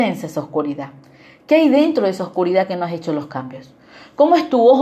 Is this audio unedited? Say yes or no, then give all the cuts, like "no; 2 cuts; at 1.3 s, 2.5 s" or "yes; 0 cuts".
yes; 0 cuts